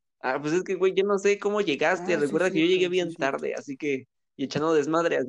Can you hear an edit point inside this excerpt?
no; 0 cuts

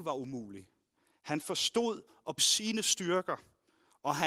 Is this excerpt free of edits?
no; 1 cut; at 2.4 s

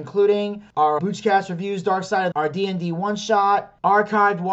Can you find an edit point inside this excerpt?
yes; 2 cuts; at 1.0 s, 2.3 s

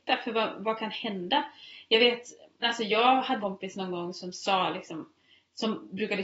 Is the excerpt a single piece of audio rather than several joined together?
no; 2 cuts; at 2.6 s, 3.4 s

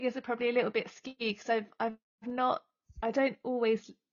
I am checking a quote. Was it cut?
no; 0 cuts

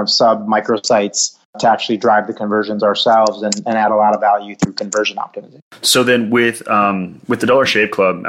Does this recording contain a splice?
yes; 1 cut; at 1.5 s

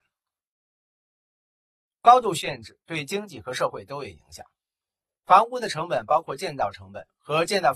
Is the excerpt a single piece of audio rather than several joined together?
yes; 0 cuts

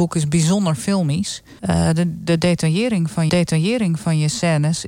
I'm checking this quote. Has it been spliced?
yes; 2 cuts; at 1.6 s, 3.3 s

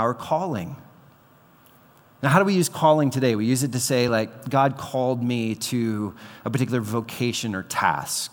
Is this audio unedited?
yes; 0 cuts

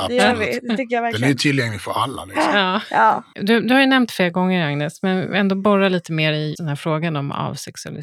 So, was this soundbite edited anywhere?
yes; 1 cut; at 6.5 s

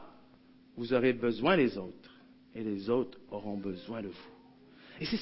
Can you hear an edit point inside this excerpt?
no; 0 cuts

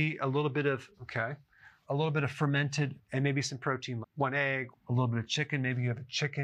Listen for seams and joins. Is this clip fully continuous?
no; 5 cuts; at 0.9 s, 1.8 s, 3.0 s, 4.0 s, 4.7 s

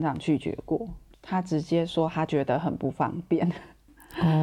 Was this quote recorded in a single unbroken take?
yes; 0 cuts

